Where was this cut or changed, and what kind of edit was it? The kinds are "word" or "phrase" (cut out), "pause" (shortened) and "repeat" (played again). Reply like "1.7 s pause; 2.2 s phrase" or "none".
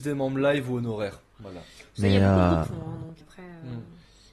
1.7 s pause; 2.6 s phrase; 3.2 s word